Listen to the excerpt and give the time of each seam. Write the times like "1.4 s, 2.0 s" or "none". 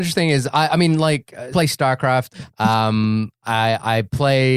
1.5 s, 2.3 s